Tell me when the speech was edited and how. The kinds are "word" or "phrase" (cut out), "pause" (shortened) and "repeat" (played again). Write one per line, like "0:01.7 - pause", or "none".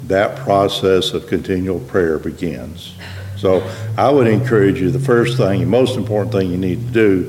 none

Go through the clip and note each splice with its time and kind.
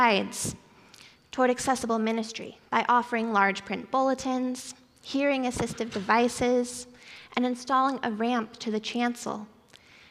0:02.7 - pause

